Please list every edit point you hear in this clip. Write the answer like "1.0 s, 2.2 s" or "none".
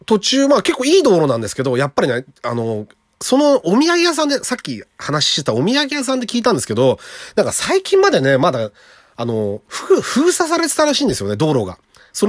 none